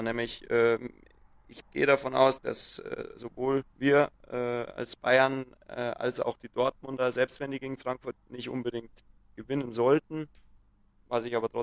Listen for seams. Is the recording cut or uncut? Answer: cut